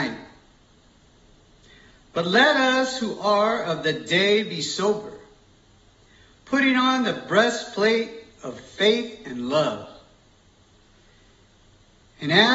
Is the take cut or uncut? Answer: uncut